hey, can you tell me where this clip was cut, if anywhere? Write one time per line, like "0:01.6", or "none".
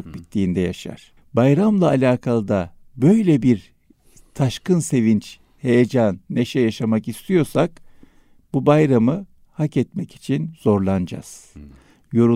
0:01.2

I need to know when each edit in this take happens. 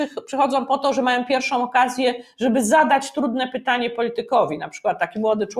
none

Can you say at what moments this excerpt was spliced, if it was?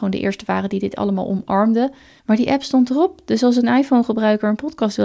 none

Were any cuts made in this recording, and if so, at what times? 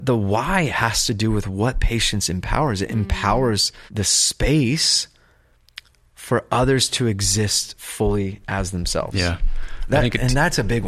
0:03.9

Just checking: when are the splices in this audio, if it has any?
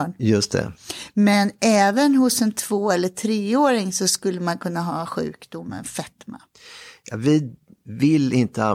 none

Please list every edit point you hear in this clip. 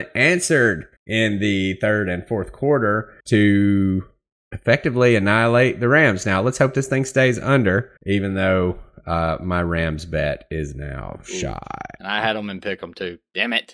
0:01.0
0:03.2
0:08.0

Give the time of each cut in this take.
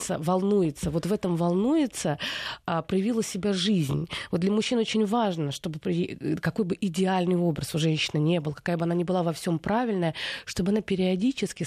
none

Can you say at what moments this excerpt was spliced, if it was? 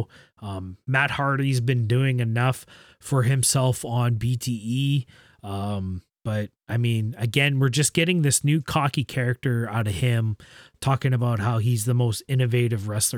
none

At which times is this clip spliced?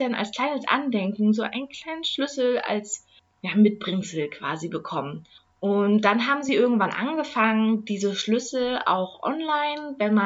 none

